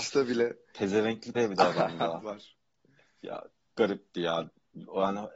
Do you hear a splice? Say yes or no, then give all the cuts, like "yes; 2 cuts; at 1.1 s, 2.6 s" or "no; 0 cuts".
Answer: yes; 3 cuts; at 1.3 s, 2.2 s, 3.7 s